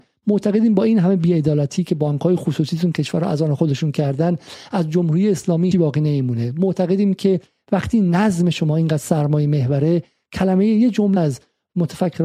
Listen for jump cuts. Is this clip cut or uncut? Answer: cut